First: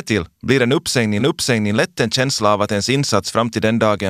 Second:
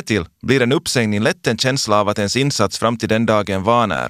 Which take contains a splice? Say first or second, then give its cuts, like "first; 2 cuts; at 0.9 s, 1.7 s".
first; 1 cut; at 1.2 s